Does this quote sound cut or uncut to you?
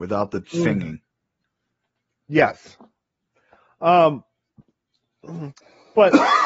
uncut